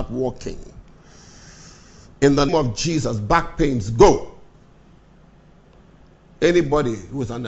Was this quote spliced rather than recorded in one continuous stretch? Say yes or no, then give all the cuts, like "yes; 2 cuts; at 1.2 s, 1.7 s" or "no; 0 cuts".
yes; 1 cut; at 2.5 s